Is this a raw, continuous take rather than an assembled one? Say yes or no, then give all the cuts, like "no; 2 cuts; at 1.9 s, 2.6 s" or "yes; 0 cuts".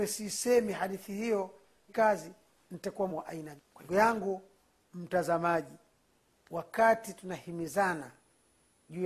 no; 4 cuts; at 1.9 s, 3.1 s, 3.6 s, 3.9 s